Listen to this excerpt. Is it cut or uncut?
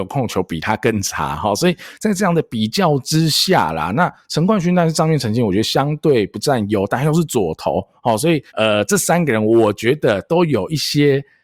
cut